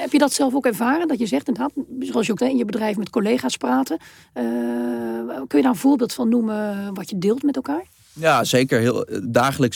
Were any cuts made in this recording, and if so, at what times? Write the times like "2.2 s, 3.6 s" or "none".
2.4 s